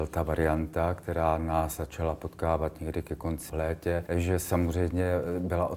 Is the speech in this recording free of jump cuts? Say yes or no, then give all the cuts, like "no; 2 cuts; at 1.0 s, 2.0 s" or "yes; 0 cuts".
no; 2 cuts; at 3.5 s, 4.1 s